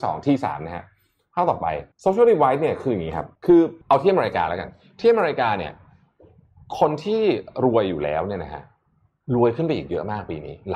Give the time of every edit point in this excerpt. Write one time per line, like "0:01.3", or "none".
0:01.9
0:03.4
0:03.8